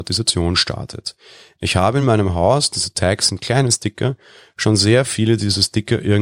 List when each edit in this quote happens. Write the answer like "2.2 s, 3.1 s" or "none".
none